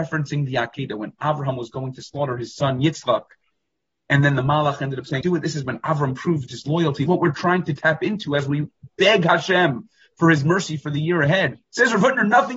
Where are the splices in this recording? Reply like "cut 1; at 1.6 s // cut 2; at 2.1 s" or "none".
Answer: cut 1; at 5.2 s // cut 2; at 7.1 s // cut 3; at 11.6 s